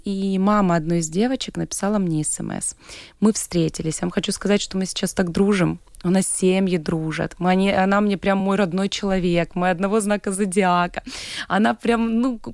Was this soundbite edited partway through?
no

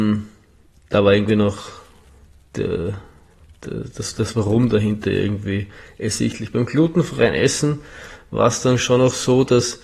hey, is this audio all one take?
yes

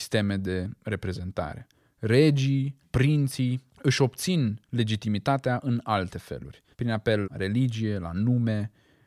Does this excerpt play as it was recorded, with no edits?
no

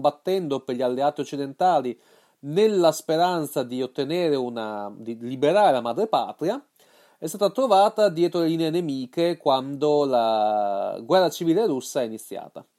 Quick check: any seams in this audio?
no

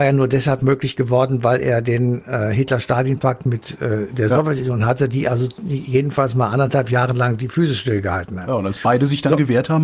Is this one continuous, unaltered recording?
yes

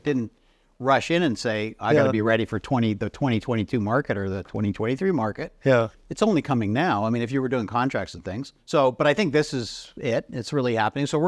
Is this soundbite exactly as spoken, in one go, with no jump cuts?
no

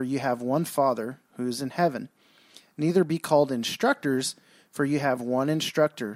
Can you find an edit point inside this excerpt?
no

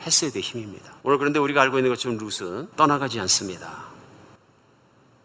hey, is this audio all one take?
no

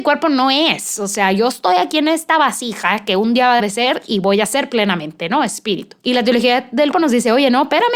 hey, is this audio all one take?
no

